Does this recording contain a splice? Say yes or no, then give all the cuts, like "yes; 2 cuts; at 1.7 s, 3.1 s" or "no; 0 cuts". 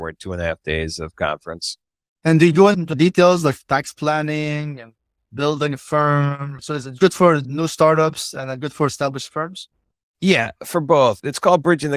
no; 0 cuts